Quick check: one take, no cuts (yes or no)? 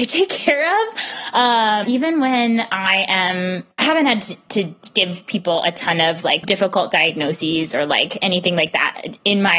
no